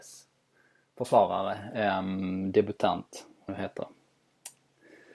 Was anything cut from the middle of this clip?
yes; 1 cut; at 3.5 s

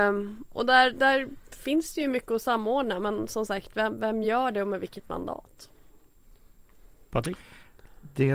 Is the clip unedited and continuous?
yes; 0 cuts

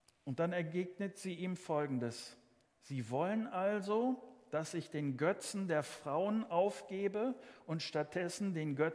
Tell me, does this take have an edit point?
yes; 1 cut; at 2.6 s

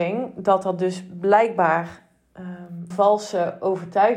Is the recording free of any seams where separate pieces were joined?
no; 1 cut; at 2.9 s

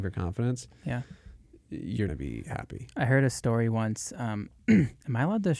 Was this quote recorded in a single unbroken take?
no; 1 cut; at 2.1 s

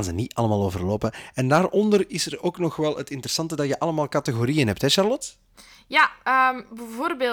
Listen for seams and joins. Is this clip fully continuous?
yes; 0 cuts

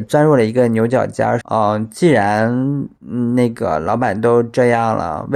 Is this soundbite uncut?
no; 1 cut; at 1.4 s

